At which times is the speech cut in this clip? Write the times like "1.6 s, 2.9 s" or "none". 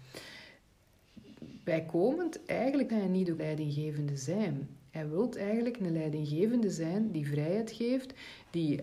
2.9 s, 3.4 s